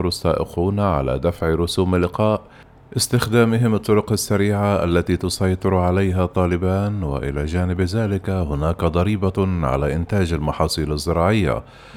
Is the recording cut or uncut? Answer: uncut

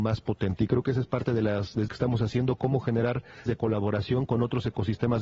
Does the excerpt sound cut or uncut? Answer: cut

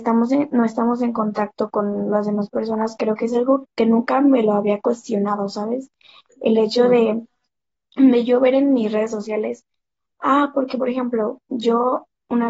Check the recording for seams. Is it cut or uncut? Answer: cut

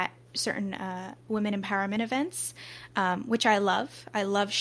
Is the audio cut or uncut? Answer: uncut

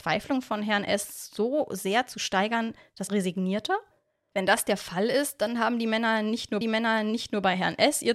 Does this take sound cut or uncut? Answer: cut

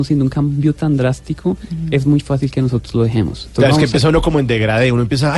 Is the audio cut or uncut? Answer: uncut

